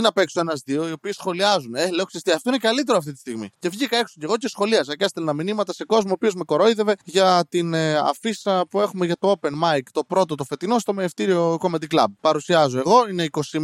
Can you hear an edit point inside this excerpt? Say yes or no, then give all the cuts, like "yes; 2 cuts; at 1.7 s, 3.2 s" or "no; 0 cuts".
yes; 3 cuts; at 3.5 s, 7.0 s, 12.2 s